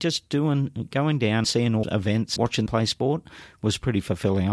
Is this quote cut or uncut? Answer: cut